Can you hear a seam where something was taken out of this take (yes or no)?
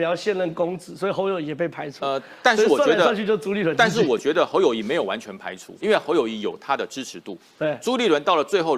yes